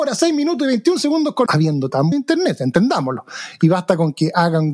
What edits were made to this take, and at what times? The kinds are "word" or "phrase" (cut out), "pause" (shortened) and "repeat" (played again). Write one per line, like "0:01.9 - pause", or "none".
0:01.5 - word
0:02.1 - phrase